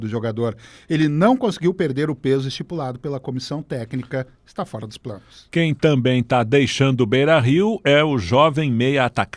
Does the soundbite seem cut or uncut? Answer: uncut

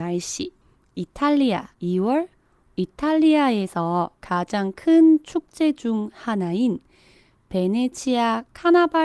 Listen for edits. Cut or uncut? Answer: cut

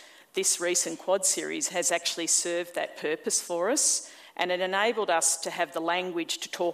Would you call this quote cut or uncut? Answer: uncut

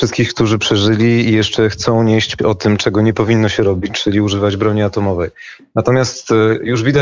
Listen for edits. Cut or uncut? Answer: cut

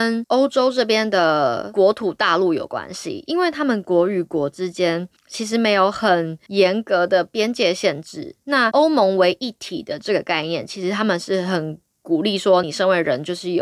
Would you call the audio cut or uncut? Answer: cut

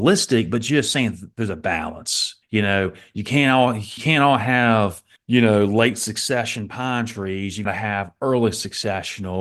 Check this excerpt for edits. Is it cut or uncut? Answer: cut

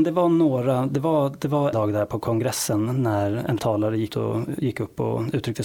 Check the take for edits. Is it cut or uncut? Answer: cut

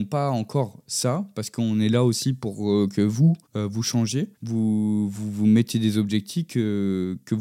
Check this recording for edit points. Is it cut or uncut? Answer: cut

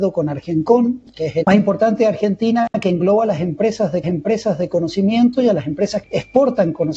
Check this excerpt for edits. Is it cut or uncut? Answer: cut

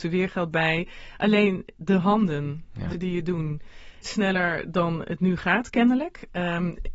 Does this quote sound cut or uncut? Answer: cut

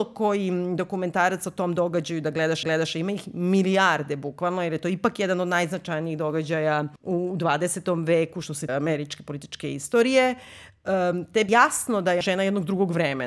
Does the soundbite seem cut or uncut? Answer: cut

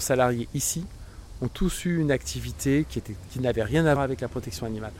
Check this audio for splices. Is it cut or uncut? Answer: cut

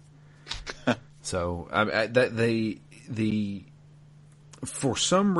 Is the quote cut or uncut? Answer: uncut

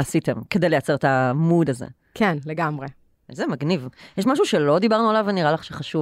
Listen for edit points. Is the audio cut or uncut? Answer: uncut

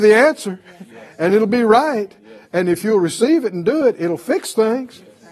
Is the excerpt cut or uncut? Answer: uncut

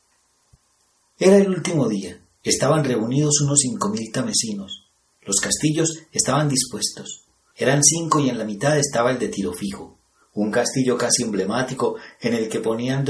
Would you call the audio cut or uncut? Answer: uncut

